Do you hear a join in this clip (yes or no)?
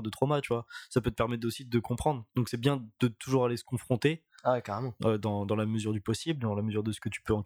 no